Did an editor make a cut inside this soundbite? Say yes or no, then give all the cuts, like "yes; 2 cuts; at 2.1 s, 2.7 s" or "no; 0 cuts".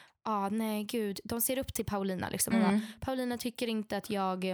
no; 0 cuts